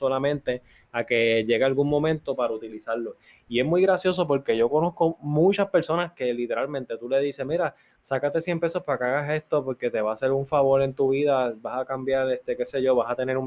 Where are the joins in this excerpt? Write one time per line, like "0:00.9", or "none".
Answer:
none